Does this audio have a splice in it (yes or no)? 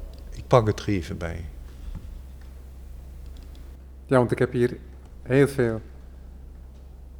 no